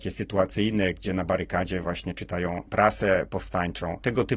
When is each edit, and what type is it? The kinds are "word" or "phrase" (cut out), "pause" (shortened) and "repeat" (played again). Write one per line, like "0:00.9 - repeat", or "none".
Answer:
none